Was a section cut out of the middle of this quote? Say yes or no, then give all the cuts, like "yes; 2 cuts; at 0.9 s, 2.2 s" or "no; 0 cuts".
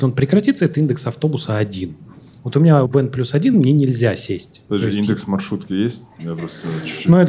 yes; 2 cuts; at 2.9 s, 3.5 s